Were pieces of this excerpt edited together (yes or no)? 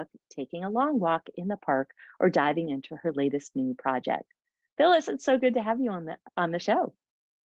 no